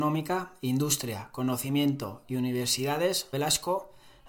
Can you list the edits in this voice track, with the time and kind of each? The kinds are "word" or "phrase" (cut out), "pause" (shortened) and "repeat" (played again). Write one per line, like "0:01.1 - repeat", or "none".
0:03.3 - word